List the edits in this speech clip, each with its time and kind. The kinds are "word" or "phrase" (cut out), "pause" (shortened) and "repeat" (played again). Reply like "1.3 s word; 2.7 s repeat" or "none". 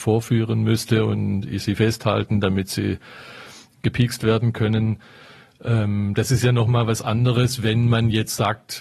none